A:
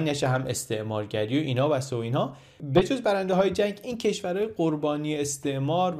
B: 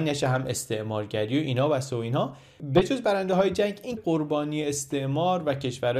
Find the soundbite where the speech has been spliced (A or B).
B